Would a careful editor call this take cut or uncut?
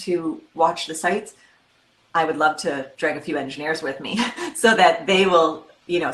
uncut